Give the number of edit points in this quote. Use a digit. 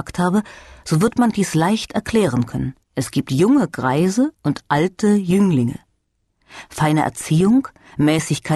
2